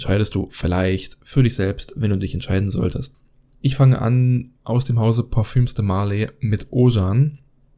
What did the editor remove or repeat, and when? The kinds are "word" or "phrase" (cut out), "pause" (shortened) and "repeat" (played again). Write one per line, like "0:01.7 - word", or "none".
none